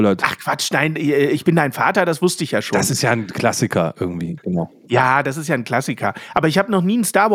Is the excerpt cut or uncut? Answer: uncut